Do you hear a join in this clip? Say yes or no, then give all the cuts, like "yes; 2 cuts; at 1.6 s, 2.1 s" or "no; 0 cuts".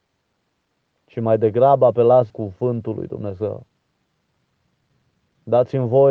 yes; 1 cut; at 2.3 s